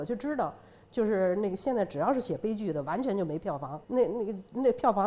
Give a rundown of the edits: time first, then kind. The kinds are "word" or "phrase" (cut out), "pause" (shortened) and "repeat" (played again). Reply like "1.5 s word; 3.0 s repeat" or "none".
3.8 s pause